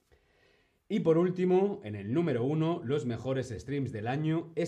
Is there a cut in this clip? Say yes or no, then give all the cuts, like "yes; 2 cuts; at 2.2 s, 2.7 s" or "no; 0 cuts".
no; 0 cuts